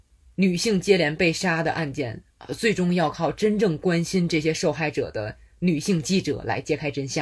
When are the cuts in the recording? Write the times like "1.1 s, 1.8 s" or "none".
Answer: none